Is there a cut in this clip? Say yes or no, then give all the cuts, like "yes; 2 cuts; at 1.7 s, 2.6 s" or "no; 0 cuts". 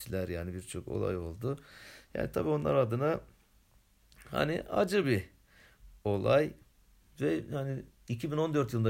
no; 0 cuts